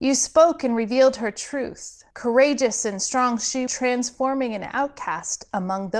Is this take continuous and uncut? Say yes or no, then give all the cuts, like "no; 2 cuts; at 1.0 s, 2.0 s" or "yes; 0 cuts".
no; 2 cuts; at 2.1 s, 3.7 s